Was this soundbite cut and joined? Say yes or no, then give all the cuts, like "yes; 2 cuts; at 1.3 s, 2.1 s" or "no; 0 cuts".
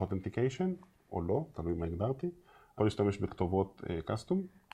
yes; 1 cut; at 2.8 s